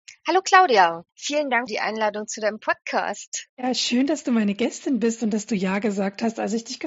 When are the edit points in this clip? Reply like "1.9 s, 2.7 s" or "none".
1.1 s, 1.7 s, 3.5 s